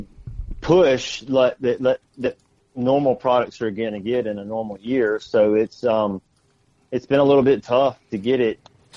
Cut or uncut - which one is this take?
uncut